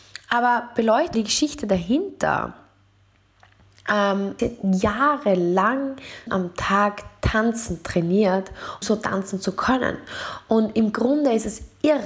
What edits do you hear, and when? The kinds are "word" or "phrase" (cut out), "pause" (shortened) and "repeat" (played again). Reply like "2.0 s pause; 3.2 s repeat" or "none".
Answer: 1.1 s word; 4.4 s word; 6.3 s word; 8.8 s word